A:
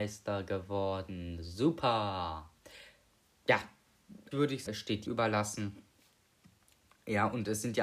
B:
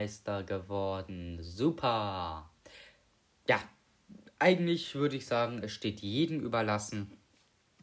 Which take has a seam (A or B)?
A